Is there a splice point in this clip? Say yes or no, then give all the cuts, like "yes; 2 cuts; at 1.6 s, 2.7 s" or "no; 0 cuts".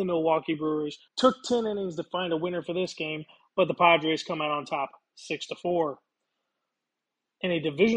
yes; 1 cut; at 1.1 s